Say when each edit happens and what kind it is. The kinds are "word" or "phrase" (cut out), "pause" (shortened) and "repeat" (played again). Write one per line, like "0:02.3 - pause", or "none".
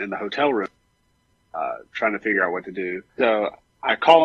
0:03.1 - pause